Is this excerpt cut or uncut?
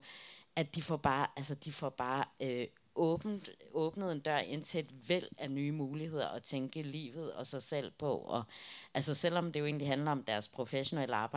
uncut